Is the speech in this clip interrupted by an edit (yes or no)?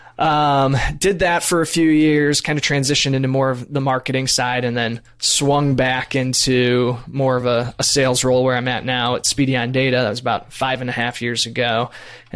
no